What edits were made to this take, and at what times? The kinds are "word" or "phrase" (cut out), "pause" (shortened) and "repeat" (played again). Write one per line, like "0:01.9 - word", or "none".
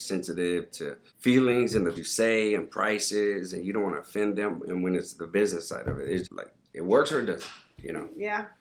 0:01.1 - pause
0:01.9 - word
0:06.2 - word